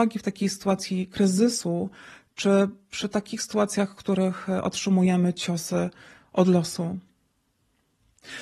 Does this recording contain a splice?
no; 0 cuts

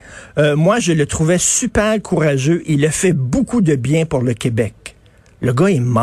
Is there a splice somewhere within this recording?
no; 0 cuts

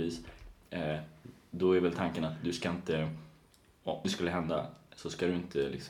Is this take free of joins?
no; 1 cut; at 4.0 s

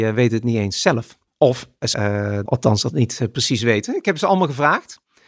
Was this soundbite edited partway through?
yes; 4 cuts; at 1.3 s, 1.9 s, 2.5 s, 2.9 s

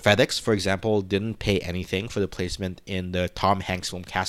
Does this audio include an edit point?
no; 0 cuts

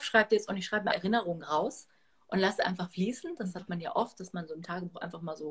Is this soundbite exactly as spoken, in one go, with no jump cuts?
no; 1 cut; at 0.9 s

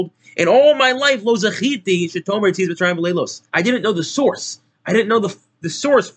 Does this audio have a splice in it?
yes; 1 cut; at 3.5 s

